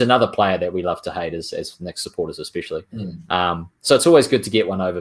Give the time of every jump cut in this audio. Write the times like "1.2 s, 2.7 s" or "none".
none